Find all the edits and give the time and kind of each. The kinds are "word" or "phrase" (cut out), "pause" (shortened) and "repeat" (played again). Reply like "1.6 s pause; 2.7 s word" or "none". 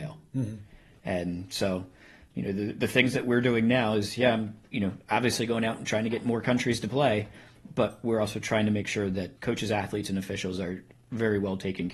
9.4 s pause